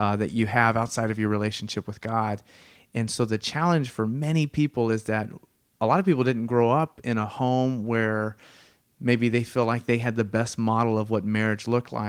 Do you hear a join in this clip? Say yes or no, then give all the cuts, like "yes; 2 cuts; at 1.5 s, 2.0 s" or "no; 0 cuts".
no; 0 cuts